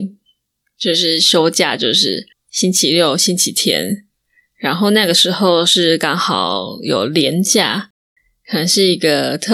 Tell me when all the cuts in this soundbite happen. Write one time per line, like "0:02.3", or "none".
0:02.3